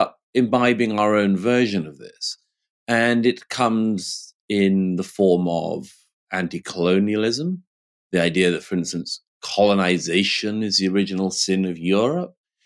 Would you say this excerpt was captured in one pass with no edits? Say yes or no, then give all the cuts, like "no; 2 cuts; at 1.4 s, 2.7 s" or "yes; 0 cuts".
no; 1 cut; at 6.2 s